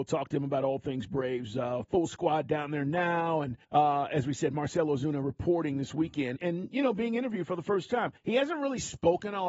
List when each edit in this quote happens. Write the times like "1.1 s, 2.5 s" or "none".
3.6 s, 6.4 s, 8.2 s